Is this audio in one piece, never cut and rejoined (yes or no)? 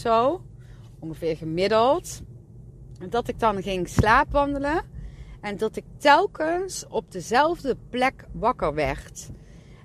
yes